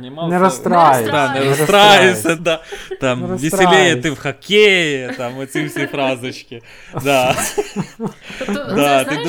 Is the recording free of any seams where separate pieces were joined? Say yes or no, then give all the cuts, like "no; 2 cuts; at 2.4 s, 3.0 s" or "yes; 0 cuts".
no; 1 cut; at 2.4 s